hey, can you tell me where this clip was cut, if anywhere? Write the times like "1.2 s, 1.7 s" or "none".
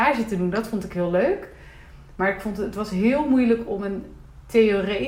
none